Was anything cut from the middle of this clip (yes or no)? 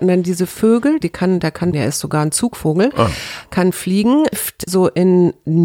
yes